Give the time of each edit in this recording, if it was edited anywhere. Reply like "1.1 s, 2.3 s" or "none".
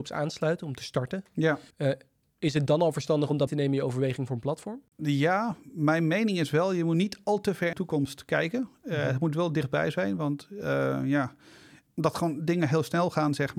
1.7 s, 2.7 s, 3.5 s, 4.9 s, 7.7 s